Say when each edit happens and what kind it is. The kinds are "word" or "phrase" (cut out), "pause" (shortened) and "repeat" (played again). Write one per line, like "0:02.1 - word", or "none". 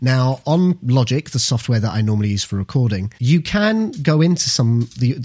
0:03.2 - pause

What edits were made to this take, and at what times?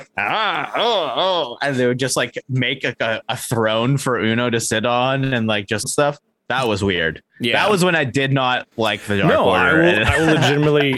0:05.8 - phrase
0:07.3 - pause
0:08.7 - pause

